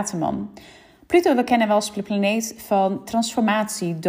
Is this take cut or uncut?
uncut